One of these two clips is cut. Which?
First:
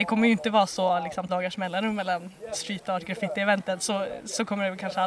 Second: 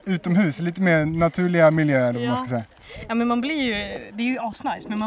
first; 1 cut; at 1.3 s

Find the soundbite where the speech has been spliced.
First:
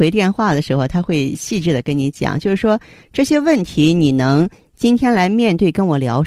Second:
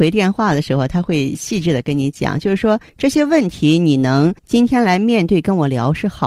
second; 2 cuts; at 2.9 s, 4.4 s

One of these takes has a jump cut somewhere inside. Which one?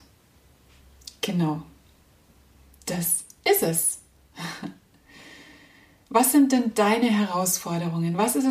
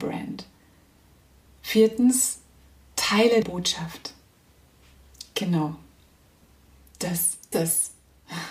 second; 2 cuts; at 3.4 s, 7.5 s

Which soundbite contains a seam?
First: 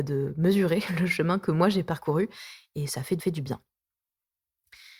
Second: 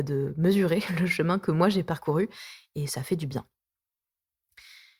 first; 1 cut; at 3.2 s

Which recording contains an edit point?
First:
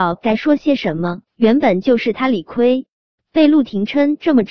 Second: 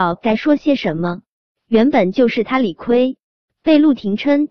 first; 1 cut; at 1.3 s

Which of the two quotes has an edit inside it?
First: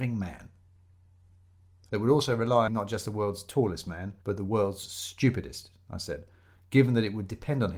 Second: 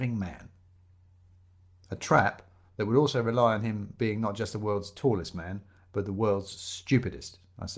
first; 3 cuts; at 1.9 s, 2.7 s, 4.2 s

